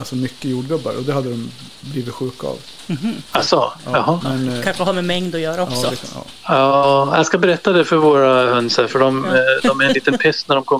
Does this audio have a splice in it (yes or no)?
no